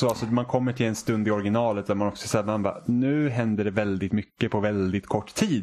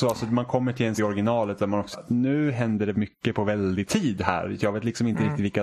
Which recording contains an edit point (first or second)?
second